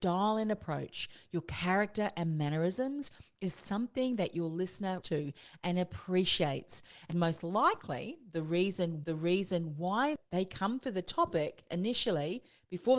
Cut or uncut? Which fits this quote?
cut